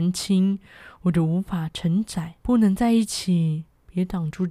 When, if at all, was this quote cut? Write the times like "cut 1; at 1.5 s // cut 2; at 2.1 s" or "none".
cut 1; at 2.4 s